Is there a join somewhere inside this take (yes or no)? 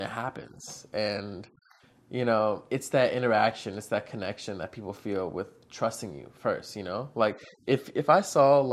no